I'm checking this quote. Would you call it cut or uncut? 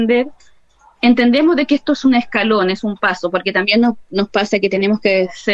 uncut